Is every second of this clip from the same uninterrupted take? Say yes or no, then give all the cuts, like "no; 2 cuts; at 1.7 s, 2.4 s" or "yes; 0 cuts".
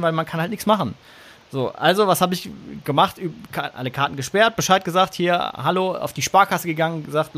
yes; 0 cuts